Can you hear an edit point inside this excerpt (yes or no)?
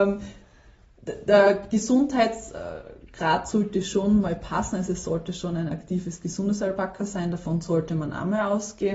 no